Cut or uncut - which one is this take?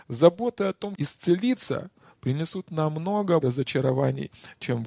cut